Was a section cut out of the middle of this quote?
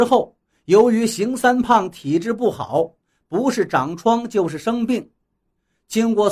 no; 0 cuts

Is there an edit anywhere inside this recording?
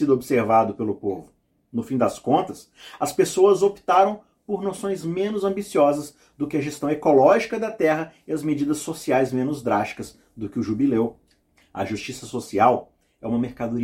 no; 0 cuts

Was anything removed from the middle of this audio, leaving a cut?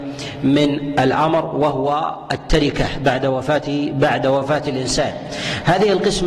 no; 0 cuts

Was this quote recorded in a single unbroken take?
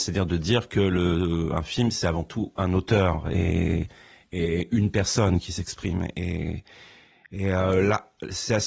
yes; 0 cuts

